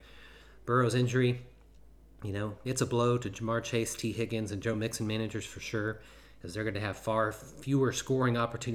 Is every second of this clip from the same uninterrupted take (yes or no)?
yes